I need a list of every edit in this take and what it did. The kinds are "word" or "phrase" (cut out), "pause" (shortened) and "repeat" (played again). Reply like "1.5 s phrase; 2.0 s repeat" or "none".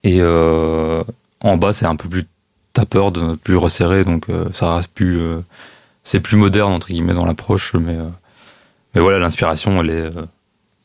none